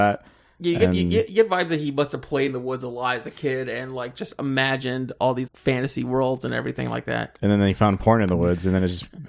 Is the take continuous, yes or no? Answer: no